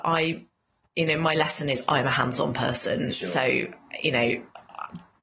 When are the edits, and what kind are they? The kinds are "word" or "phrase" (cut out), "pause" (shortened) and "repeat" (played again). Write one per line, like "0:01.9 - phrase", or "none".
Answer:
none